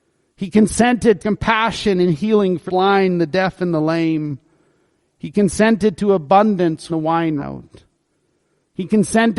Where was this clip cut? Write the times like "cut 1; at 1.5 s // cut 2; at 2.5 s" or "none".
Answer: cut 1; at 1.2 s // cut 2; at 2.7 s // cut 3; at 6.9 s // cut 4; at 7.4 s